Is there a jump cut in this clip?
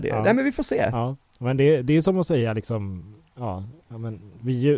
no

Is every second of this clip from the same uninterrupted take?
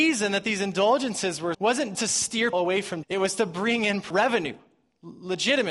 no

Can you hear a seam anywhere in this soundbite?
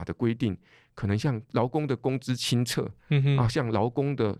yes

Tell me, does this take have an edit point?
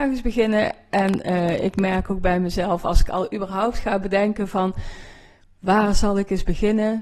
no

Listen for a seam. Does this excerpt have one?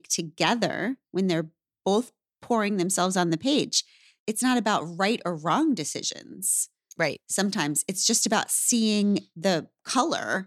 no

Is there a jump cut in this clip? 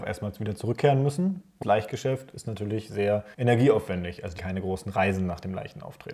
yes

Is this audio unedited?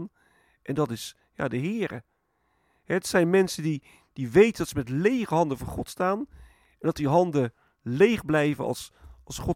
yes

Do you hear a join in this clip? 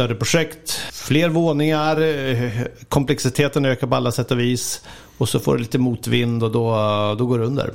no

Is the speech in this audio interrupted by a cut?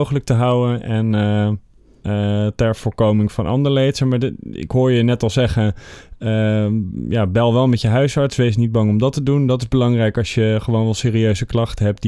no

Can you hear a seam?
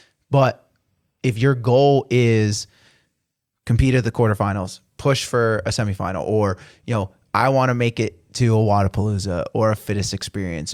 no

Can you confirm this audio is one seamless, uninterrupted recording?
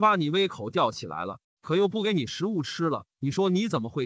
no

